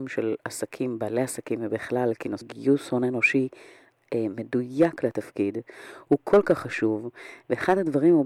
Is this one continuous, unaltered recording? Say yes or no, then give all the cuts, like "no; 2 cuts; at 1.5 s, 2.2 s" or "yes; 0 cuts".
no; 1 cut; at 2.4 s